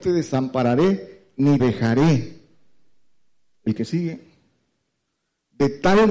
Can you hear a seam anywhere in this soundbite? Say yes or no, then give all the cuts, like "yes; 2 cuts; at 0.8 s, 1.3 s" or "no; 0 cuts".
yes; 1 cut; at 1.6 s